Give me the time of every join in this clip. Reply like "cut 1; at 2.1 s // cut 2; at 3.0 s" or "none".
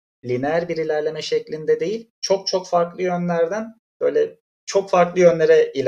none